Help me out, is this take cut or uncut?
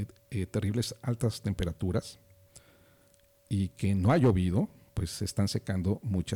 uncut